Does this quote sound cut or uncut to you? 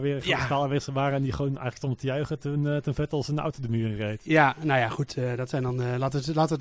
uncut